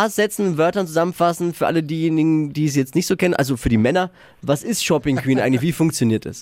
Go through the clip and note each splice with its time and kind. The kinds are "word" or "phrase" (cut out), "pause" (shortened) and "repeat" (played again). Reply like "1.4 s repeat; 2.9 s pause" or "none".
none